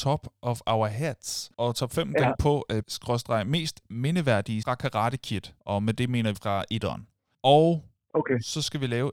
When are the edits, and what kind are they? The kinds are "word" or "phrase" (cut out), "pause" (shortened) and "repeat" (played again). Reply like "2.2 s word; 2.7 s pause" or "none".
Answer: 1.5 s pause; 2.3 s word; 2.8 s word; 4.6 s word; 5.6 s pause; 6.3 s word; 7.3 s pause